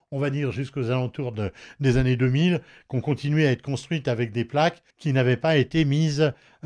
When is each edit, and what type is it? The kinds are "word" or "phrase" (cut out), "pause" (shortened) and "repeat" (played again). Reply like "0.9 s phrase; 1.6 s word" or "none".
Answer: 4.9 s pause